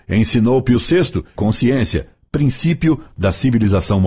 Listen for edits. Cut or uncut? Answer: cut